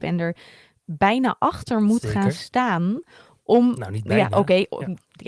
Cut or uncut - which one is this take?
uncut